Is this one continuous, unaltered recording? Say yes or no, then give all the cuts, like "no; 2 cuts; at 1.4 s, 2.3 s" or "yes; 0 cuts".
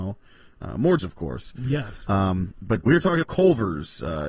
no; 3 cuts; at 1.0 s, 2.9 s, 3.2 s